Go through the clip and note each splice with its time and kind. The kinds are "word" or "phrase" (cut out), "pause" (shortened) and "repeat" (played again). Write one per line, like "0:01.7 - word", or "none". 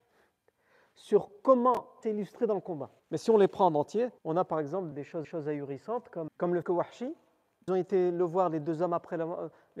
0:02.0 - phrase
0:03.0 - pause
0:04.2 - pause
0:04.9 - word
0:05.2 - repeat
0:06.3 - word
0:06.6 - word
0:07.7 - phrase

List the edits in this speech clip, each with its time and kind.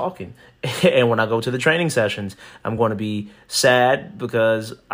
none

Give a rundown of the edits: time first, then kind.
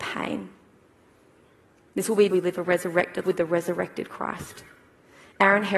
0:02.3 - word
0:03.2 - word

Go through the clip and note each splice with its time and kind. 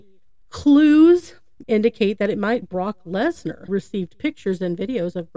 0:01.6 - word
0:02.6 - word
0:03.7 - word

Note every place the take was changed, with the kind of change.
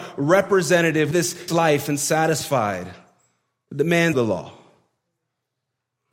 0:01.1 - word
0:01.5 - word
0:04.1 - word

